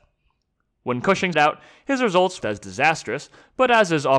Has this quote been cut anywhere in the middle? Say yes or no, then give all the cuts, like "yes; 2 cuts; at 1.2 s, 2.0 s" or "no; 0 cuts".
yes; 2 cuts; at 1.3 s, 2.4 s